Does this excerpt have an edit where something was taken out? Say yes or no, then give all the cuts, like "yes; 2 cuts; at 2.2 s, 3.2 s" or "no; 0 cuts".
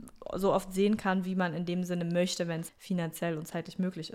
yes; 1 cut; at 2.7 s